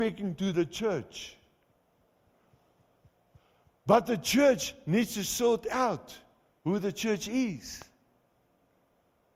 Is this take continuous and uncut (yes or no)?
yes